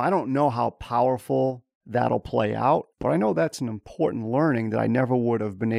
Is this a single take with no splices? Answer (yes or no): no